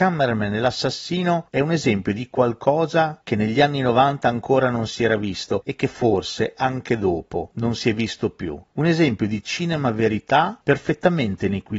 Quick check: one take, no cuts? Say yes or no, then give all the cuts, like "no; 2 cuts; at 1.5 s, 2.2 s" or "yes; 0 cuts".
yes; 0 cuts